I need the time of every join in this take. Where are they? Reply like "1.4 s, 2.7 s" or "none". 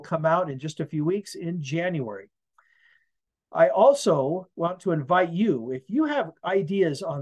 none